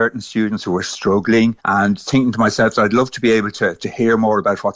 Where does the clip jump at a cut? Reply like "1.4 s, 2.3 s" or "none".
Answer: 1.6 s